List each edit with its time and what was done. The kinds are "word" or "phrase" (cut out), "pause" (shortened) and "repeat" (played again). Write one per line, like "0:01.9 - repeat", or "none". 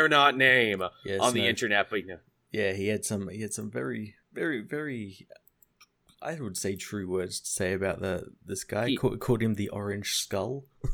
0:04.2 - pause